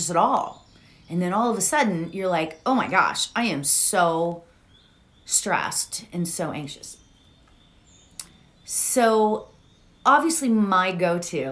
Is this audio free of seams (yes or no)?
yes